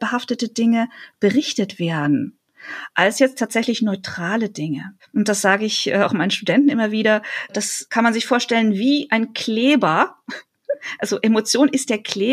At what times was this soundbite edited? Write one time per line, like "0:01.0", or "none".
none